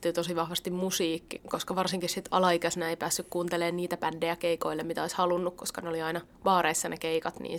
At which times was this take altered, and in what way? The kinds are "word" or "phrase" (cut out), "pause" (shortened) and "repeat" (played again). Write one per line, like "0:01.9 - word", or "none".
0:01.4 - word